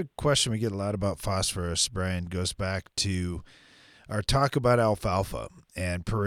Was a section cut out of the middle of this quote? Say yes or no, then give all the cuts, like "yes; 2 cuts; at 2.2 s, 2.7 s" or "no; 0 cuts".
no; 0 cuts